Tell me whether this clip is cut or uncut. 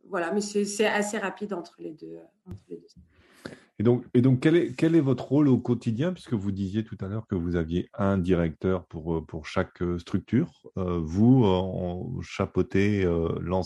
uncut